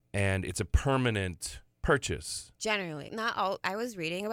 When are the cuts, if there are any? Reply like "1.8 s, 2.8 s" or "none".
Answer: 1.7 s, 3.1 s